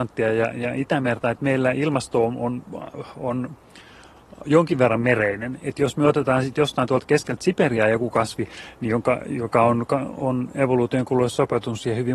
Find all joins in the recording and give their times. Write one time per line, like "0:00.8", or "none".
none